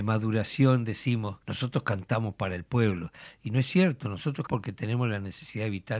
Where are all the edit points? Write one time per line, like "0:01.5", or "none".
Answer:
0:01.4
0:04.5